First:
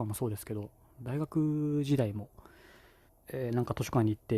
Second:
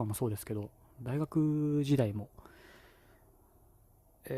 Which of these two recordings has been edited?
first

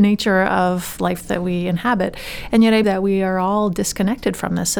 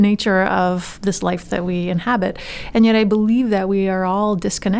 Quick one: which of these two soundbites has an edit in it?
first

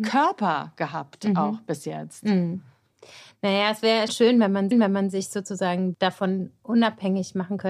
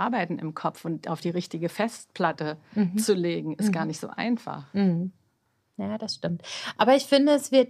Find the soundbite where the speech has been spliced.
first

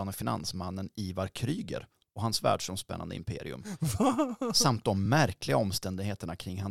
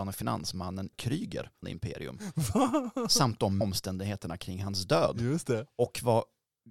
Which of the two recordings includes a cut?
second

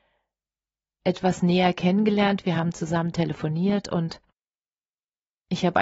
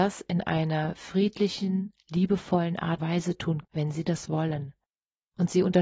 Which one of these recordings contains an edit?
second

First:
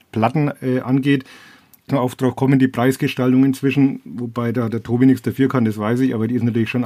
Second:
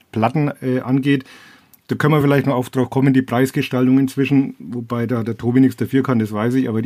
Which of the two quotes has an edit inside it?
first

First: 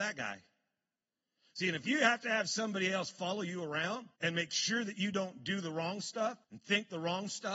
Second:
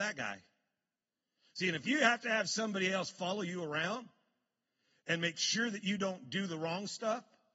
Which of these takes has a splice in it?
first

